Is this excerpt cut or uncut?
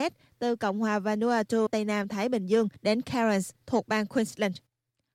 cut